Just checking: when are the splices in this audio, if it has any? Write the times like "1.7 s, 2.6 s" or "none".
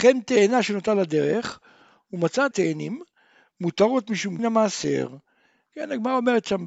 2.5 s, 4.4 s

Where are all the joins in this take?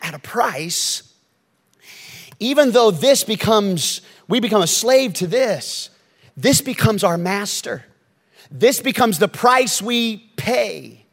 none

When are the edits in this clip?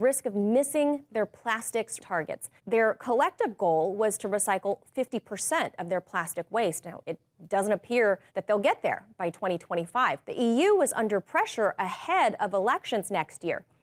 2.0 s, 2.6 s, 8.3 s, 10.2 s

